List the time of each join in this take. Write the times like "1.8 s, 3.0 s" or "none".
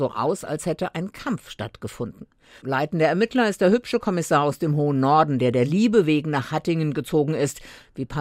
none